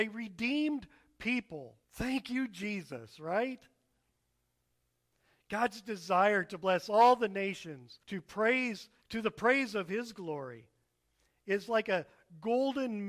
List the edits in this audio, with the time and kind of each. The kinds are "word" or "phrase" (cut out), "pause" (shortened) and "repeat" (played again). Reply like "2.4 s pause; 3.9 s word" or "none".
1.8 s pause; 8.0 s pause; 9.0 s pause